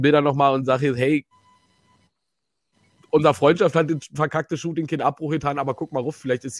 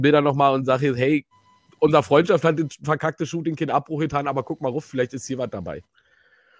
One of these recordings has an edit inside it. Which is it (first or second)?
second